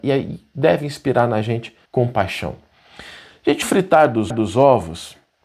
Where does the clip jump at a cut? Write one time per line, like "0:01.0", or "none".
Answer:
0:01.9
0:03.6
0:04.3